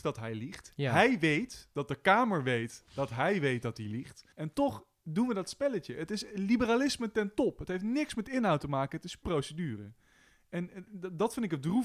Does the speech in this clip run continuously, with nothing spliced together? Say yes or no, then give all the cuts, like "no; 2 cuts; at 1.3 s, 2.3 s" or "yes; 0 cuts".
no; 2 cuts; at 4.3 s, 9.2 s